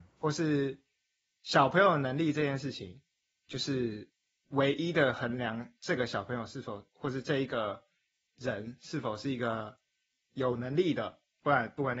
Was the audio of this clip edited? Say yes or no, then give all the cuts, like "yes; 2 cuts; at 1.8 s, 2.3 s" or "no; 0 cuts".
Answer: no; 0 cuts